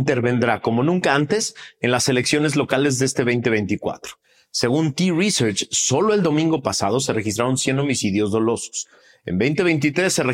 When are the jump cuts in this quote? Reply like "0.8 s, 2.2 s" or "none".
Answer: none